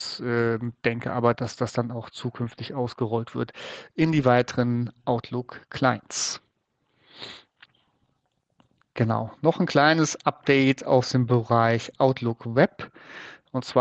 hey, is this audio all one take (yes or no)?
yes